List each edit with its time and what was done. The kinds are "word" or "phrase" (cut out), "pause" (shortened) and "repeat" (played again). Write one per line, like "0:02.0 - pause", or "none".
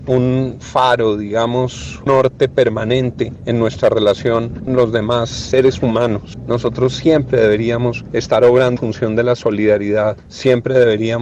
0:02.1 - word
0:04.7 - word
0:08.8 - word